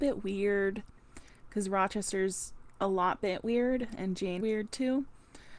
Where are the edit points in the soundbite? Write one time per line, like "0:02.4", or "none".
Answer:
0:04.4